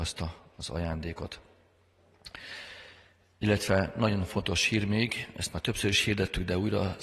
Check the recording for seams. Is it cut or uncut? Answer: uncut